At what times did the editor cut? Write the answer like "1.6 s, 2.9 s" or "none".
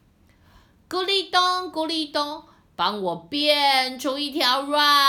none